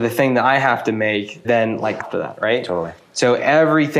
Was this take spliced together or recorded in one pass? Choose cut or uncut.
cut